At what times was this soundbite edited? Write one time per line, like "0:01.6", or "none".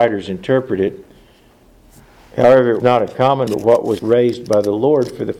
0:02.8
0:03.5
0:04.0